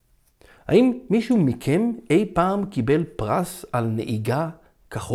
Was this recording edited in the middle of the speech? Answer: no; 0 cuts

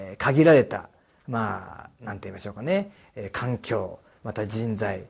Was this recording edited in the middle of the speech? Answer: no; 0 cuts

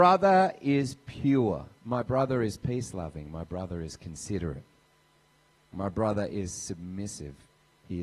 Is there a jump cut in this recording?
yes; 1 cut; at 1.8 s

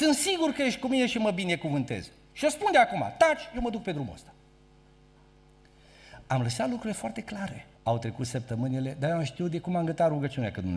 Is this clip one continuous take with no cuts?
no; 1 cut; at 7.7 s

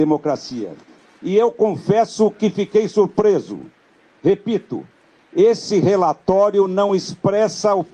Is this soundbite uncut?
yes; 0 cuts

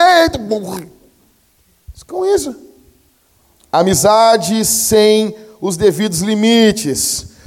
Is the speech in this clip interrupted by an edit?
yes; 1 cut; at 3.3 s

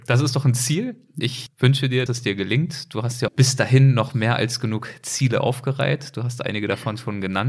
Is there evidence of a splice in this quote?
yes; 3 cuts; at 1.5 s, 2.1 s, 3.3 s

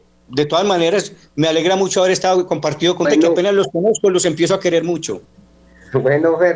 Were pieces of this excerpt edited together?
yes; 1 cut; at 3.0 s

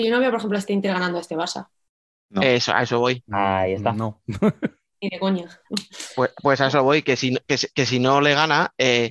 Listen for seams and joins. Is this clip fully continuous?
yes; 0 cuts

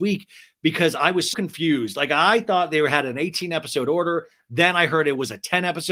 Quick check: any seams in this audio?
yes; 1 cut; at 1.3 s

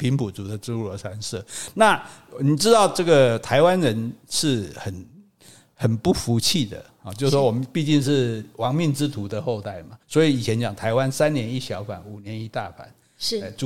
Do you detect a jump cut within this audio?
yes; 1 cut; at 10.0 s

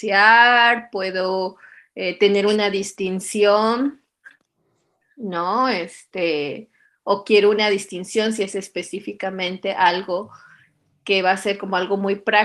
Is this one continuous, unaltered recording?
yes; 0 cuts

